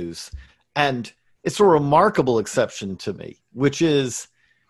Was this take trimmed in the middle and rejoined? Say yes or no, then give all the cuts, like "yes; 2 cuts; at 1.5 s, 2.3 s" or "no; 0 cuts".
yes; 1 cut; at 3.4 s